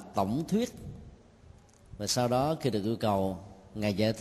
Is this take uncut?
yes; 0 cuts

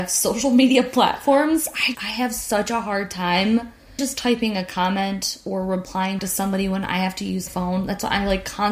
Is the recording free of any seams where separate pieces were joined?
no; 4 cuts; at 1.9 s, 4.0 s, 6.2 s, 7.5 s

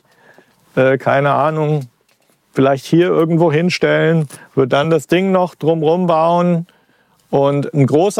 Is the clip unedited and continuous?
yes; 0 cuts

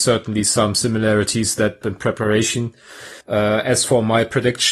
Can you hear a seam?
yes; 2 cuts; at 1.8 s, 3.2 s

